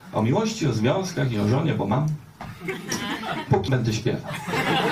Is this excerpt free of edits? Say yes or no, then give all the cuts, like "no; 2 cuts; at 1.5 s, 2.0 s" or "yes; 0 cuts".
no; 2 cuts; at 1.3 s, 3.7 s